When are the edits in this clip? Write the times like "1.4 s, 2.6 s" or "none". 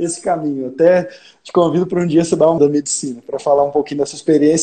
2.6 s